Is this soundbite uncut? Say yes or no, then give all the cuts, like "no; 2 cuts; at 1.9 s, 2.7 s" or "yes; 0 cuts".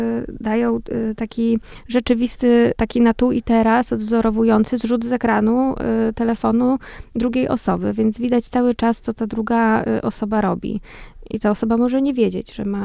no; 1 cut; at 2.7 s